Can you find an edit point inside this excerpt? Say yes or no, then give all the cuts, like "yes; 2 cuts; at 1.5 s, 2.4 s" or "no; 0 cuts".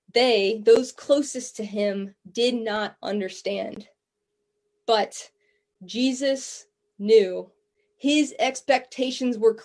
no; 0 cuts